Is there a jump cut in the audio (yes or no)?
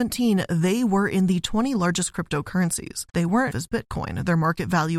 yes